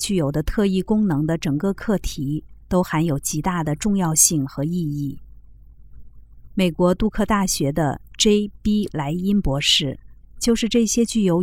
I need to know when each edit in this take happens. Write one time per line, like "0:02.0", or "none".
0:02.6